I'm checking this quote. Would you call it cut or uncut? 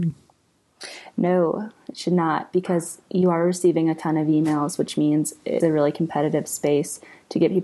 cut